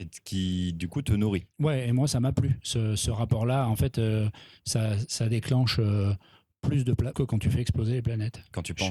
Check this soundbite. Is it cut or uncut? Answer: cut